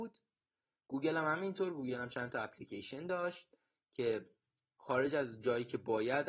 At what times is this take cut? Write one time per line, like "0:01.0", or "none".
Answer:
none

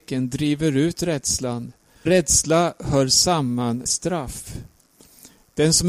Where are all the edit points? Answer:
0:02.1
0:03.9

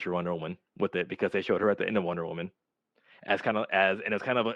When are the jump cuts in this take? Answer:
none

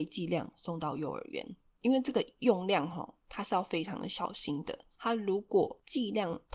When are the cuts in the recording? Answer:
none

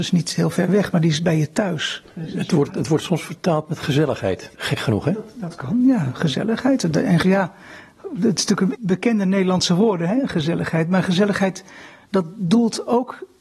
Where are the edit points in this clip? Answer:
0:04.5
0:07.2
0:08.7

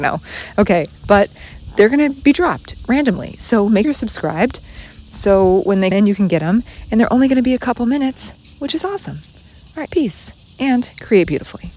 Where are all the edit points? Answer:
0:03.8
0:05.9
0:09.9

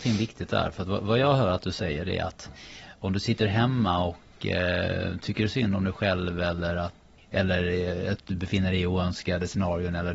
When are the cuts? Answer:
0:07.2

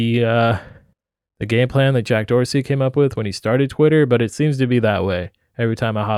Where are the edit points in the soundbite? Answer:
0:00.9

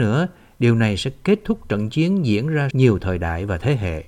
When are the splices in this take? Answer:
0:02.7

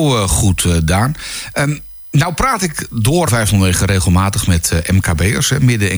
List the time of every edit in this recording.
0:03.3

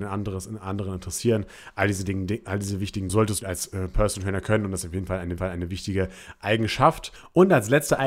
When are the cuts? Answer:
0:03.1
0:03.4
0:05.4

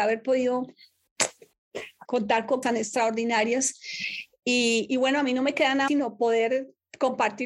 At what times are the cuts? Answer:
0:02.1
0:02.6
0:05.9

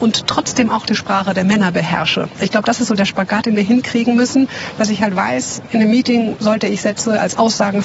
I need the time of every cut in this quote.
none

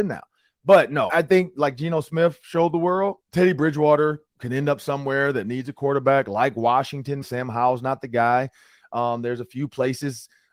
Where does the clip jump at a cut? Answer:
0:01.1
0:03.2
0:04.3
0:07.2

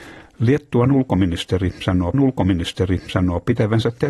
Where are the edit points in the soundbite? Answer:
0:02.1

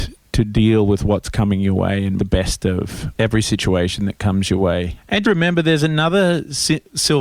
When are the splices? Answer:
0:02.2
0:03.2
0:05.2

